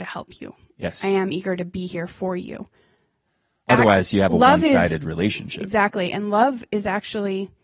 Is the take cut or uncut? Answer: uncut